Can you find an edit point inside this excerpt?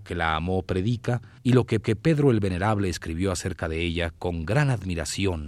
yes; 2 cuts; at 1.4 s, 1.8 s

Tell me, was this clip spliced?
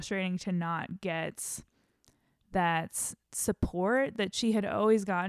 no; 0 cuts

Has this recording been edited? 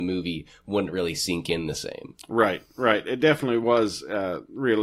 no; 0 cuts

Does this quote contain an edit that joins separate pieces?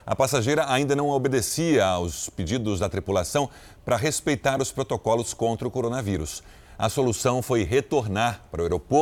no; 0 cuts

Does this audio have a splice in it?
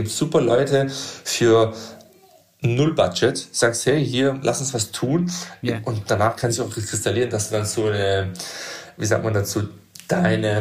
no; 0 cuts

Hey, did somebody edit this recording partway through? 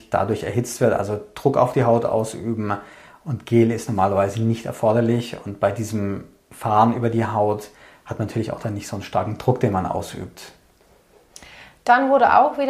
no; 0 cuts

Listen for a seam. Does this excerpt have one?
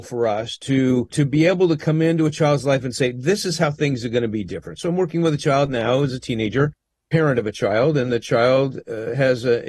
no; 0 cuts

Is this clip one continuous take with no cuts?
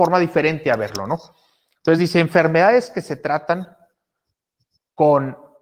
yes; 0 cuts

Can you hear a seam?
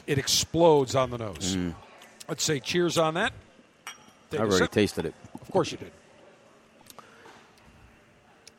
no; 0 cuts

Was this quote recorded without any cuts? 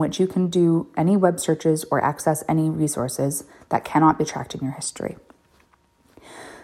yes; 0 cuts

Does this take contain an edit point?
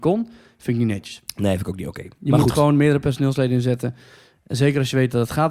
no; 0 cuts

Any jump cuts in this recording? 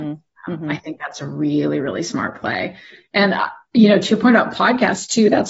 no; 0 cuts

